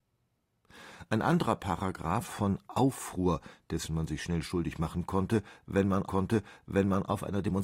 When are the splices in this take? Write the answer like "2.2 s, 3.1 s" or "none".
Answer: 2.2 s, 6.1 s